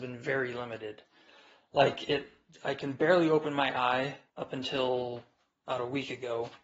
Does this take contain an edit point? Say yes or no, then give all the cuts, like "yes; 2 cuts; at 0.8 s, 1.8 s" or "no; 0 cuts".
yes; 1 cut; at 4.3 s